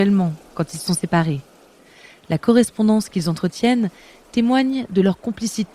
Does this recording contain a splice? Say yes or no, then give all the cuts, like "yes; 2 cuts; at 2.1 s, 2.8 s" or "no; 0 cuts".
no; 0 cuts